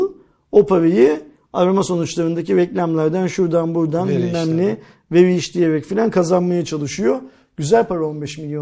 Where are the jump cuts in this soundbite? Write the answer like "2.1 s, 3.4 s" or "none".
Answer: none